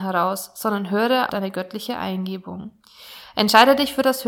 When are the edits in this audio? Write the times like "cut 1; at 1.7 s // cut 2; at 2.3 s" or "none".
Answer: cut 1; at 1.3 s

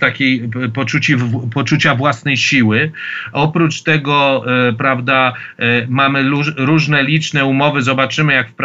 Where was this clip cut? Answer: none

